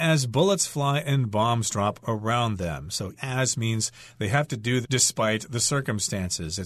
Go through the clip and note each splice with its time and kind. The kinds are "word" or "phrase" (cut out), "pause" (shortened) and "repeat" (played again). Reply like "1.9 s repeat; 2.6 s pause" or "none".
3.2 s word; 4.8 s word